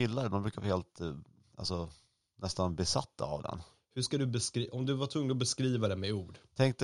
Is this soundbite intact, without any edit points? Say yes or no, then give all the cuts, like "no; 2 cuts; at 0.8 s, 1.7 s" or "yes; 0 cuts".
yes; 0 cuts